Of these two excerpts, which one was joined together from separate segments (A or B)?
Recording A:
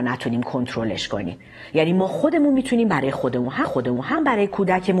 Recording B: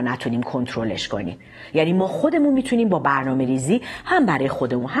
A